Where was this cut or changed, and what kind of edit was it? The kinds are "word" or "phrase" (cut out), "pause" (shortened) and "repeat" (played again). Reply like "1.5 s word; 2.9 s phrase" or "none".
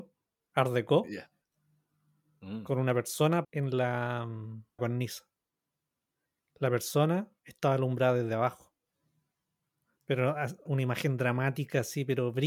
3.4 s word; 4.8 s word; 10.7 s word

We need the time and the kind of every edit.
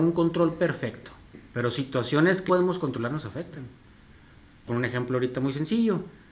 1.5 s pause; 2.5 s word; 4.7 s phrase

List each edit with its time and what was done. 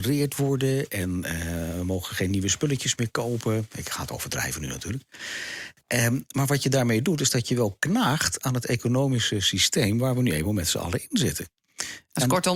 none

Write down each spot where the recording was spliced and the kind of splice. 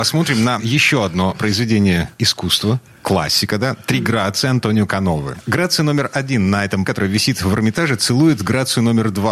6.9 s word

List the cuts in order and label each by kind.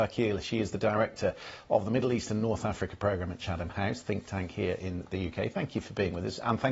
none

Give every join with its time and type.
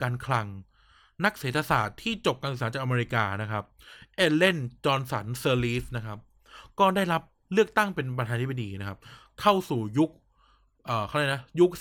none

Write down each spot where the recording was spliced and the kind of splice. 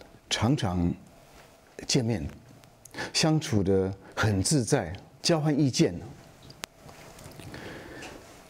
5.2 s phrase

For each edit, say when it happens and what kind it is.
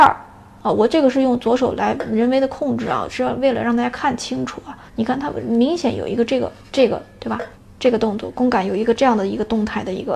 4.9 s pause; 6.6 s pause; 7.5 s pause

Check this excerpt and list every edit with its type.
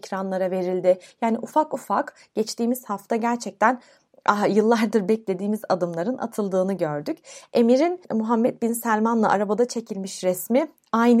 none

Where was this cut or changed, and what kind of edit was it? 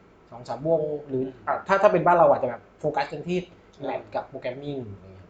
none

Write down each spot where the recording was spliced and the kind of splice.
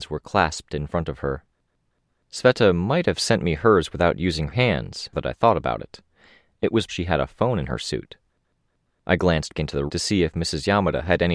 4.5 s word; 5.1 s word; 6.9 s word; 9.5 s word; 9.9 s word

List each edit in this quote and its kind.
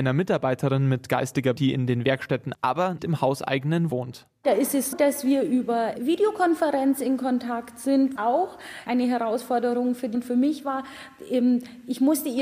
1.6 s word; 2.5 s word; 3.0 s word; 3.9 s word; 4.9 s word; 6.0 s word; 8.2 s word; 8.9 s word; 10.1 s word

